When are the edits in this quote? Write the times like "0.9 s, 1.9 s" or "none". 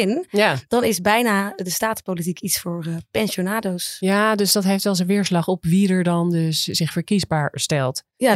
none